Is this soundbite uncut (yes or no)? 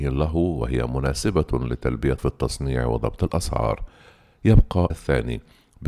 no